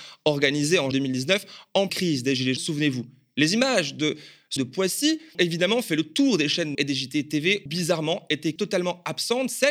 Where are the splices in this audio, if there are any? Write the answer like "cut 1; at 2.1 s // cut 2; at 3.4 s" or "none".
cut 1; at 0.9 s // cut 2; at 1.9 s // cut 3; at 2.6 s // cut 4; at 4.6 s // cut 5; at 5.3 s // cut 6; at 6.7 s // cut 7; at 7.7 s // cut 8; at 8.6 s